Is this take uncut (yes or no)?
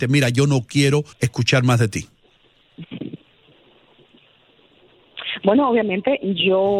no